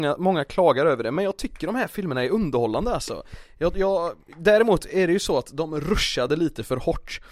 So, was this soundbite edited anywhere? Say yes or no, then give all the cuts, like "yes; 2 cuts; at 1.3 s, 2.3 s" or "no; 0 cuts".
no; 0 cuts